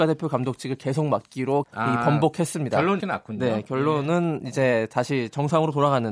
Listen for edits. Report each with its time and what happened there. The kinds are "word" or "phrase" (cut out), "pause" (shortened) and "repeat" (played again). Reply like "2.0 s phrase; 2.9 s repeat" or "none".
1.6 s word; 3.0 s word